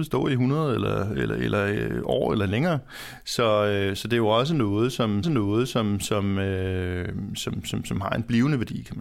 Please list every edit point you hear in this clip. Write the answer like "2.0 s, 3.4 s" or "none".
5.2 s